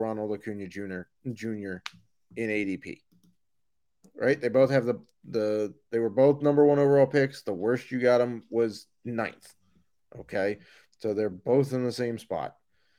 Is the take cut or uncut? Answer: uncut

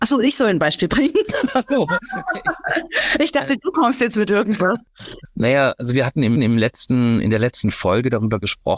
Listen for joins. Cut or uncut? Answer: cut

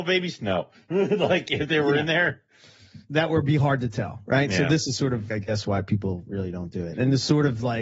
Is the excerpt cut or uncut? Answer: cut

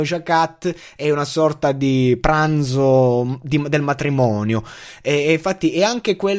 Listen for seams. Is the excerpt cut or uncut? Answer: uncut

